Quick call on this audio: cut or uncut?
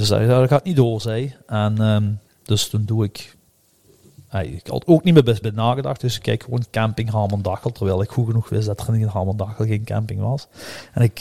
cut